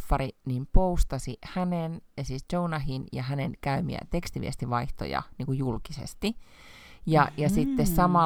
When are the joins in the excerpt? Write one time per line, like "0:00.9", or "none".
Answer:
0:02.1